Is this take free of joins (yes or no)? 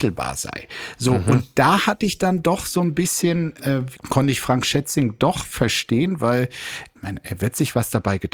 yes